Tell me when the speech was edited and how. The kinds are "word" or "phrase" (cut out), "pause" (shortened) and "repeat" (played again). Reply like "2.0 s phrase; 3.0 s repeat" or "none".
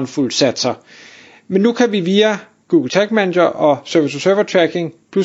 none